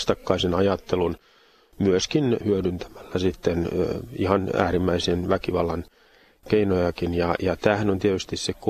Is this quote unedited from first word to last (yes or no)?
yes